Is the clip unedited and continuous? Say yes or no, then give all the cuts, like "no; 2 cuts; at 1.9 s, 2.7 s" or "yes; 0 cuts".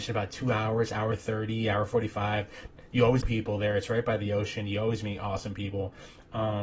no; 1 cut; at 3.2 s